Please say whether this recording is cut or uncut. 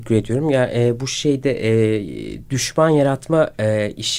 uncut